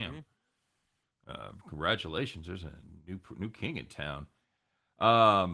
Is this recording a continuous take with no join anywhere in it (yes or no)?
yes